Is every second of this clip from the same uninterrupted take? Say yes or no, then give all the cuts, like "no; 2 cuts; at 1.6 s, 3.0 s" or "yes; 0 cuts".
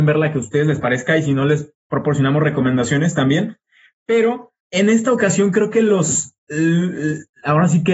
no; 2 cuts; at 1.8 s, 4.6 s